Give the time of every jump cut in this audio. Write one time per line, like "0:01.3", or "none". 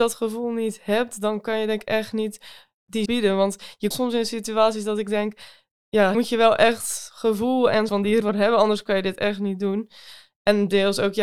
0:03.0
0:03.9
0:06.1
0:07.9
0:08.2